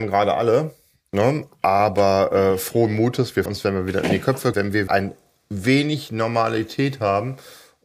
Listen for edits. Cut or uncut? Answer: cut